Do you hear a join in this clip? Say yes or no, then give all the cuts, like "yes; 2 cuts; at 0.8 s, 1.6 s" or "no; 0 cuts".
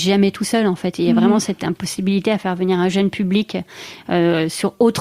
no; 0 cuts